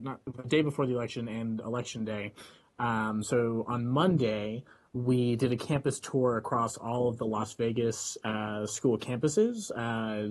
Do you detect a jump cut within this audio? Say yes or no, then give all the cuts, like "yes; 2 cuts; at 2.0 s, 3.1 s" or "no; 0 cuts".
no; 0 cuts